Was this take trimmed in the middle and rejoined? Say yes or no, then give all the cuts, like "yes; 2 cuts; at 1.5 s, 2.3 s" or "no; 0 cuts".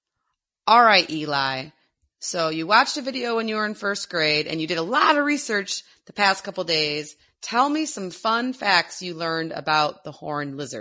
no; 0 cuts